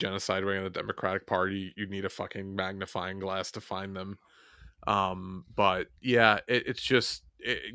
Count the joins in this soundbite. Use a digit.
0